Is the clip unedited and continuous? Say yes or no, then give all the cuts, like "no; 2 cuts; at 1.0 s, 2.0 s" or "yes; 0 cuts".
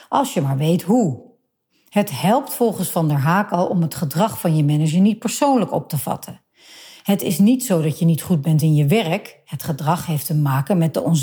yes; 0 cuts